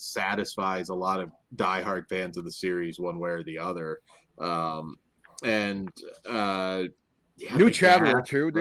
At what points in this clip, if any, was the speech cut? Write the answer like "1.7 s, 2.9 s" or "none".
none